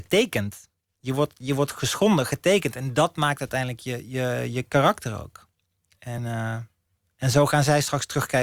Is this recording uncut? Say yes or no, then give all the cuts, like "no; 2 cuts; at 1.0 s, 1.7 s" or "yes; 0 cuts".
yes; 0 cuts